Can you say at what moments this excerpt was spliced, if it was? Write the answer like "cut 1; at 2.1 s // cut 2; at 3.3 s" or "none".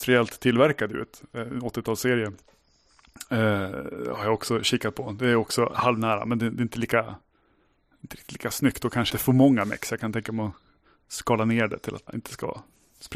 cut 1; at 9.1 s // cut 2; at 12.1 s